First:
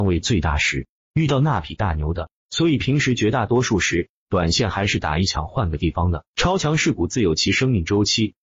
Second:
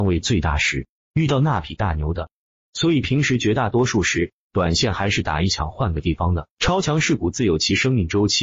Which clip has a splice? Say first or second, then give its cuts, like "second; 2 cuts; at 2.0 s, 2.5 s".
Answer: first; 1 cut; at 2.4 s